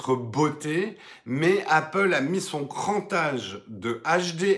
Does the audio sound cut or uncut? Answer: uncut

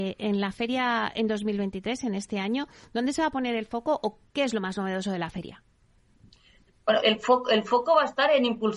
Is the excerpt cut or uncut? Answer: cut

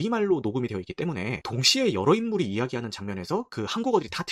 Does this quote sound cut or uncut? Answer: uncut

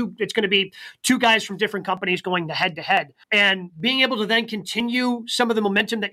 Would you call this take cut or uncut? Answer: cut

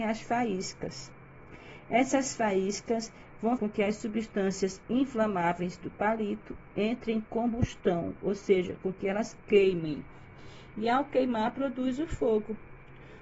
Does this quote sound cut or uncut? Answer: cut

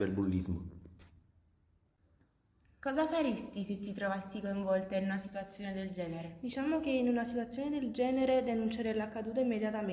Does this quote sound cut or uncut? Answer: uncut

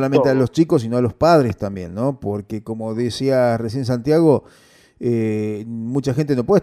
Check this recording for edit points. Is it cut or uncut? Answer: uncut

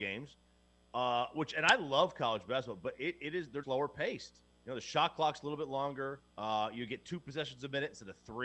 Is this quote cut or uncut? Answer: cut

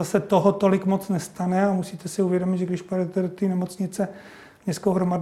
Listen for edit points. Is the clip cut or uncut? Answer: uncut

